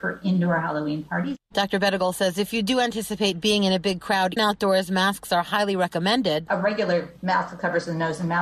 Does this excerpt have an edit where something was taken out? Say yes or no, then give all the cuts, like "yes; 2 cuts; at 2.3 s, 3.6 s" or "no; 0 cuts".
yes; 1 cut; at 4.4 s